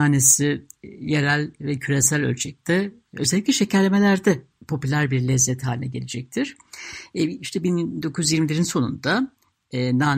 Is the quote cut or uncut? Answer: uncut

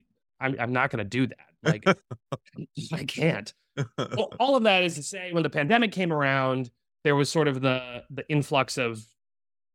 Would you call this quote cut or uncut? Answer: uncut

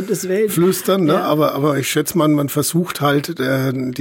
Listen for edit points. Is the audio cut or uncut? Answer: uncut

